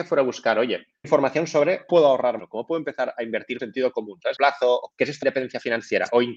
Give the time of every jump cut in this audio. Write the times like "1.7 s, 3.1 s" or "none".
1.0 s, 1.9 s, 2.4 s, 3.6 s, 4.4 s, 4.9 s, 5.2 s

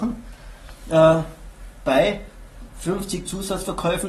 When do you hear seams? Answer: none

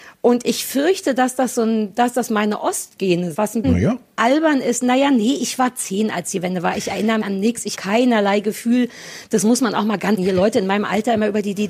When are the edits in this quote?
3.3 s, 3.6 s, 7.2 s, 7.7 s, 10.2 s

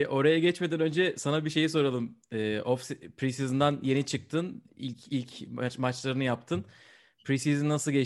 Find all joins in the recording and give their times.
none

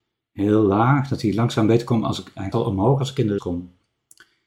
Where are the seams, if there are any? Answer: 2.5 s, 3.4 s

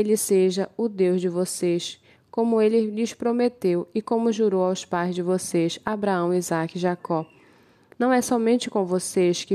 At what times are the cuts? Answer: none

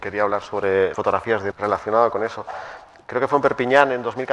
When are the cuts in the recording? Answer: 0.9 s, 1.5 s

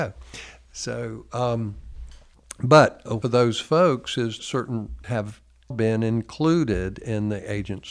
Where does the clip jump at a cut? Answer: 3.2 s, 4.4 s, 5.0 s, 5.7 s

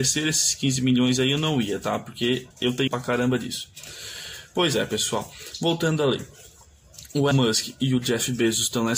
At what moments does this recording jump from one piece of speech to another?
2.5 s, 2.9 s, 7.3 s

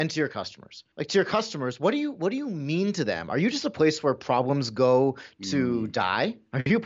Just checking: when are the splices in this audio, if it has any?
0.9 s

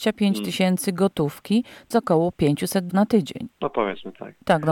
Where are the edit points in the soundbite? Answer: 1.9 s, 2.9 s, 3.5 s

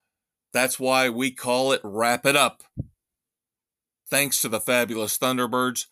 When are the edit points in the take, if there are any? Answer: none

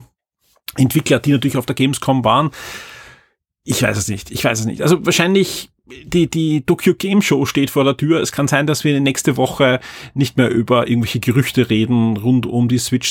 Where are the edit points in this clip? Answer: none

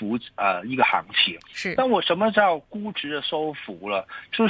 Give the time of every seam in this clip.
1.4 s

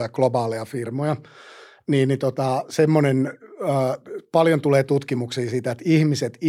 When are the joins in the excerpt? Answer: none

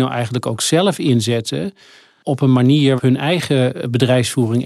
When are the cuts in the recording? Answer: 3.0 s

